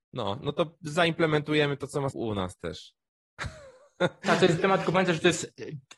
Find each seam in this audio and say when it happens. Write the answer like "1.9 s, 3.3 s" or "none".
2.1 s, 4.6 s